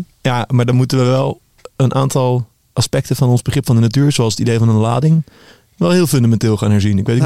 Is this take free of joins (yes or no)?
yes